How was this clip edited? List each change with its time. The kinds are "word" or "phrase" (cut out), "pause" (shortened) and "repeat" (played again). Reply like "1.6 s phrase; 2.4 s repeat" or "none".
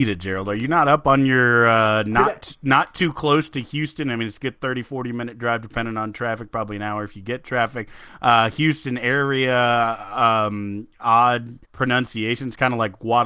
11.6 s pause